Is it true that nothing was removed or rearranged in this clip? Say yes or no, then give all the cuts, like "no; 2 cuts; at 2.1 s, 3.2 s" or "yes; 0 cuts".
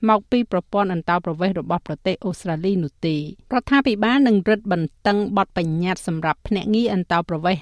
no; 1 cut; at 3.4 s